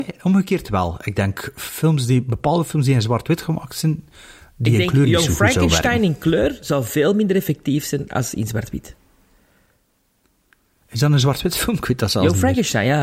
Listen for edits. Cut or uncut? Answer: uncut